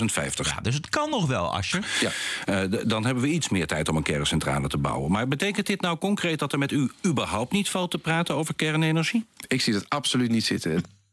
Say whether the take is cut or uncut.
cut